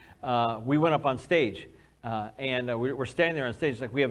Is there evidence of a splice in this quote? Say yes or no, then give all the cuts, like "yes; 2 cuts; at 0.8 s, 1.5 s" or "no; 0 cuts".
no; 0 cuts